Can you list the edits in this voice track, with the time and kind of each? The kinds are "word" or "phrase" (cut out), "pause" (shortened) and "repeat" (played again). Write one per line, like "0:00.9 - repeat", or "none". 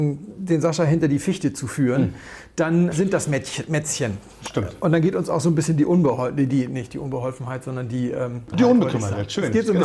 0:02.9 - word
0:08.5 - word